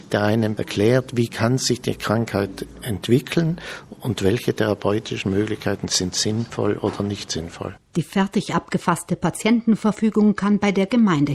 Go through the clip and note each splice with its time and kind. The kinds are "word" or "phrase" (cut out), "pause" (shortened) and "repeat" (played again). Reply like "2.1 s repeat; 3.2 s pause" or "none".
7.8 s pause